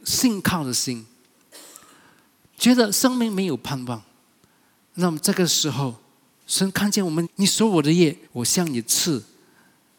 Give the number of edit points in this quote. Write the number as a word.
two